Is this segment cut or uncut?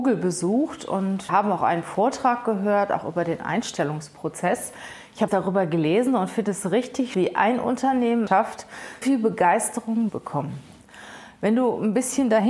cut